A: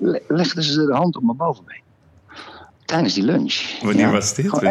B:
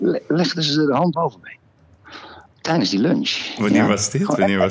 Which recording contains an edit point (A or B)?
B